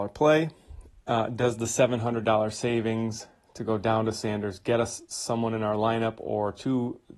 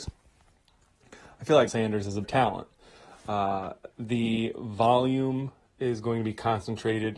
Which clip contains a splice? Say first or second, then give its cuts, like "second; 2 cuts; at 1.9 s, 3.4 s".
second; 3 cuts; at 1.7 s, 2.2 s, 3.9 s